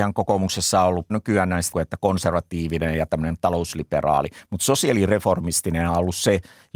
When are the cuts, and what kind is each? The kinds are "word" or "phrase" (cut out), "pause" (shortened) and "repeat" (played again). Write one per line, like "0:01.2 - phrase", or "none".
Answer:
0:01.1 - word
0:01.7 - word